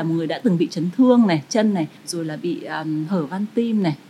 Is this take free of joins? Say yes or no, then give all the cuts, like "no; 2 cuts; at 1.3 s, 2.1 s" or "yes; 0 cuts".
no; 1 cut; at 2.0 s